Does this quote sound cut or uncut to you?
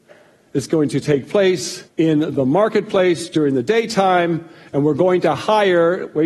cut